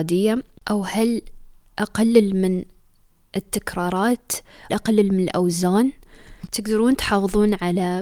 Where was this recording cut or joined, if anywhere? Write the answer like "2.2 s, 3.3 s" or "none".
4.7 s